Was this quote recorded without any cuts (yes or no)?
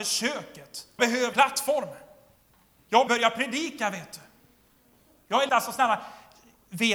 no